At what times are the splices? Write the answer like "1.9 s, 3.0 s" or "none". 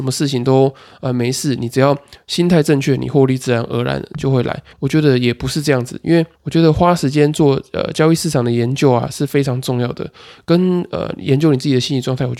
4.7 s, 6.3 s